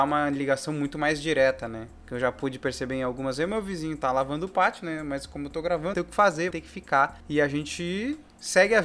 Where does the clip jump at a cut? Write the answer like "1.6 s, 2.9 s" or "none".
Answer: 5.9 s, 6.5 s